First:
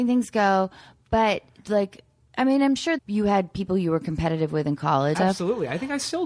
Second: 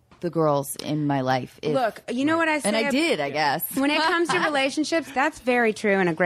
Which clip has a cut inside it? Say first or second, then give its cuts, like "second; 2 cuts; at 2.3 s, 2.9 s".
first; 3 cuts; at 1.6 s, 3.0 s, 5.1 s